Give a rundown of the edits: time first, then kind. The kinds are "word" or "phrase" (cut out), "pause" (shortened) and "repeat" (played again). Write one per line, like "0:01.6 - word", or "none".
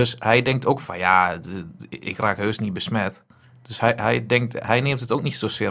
none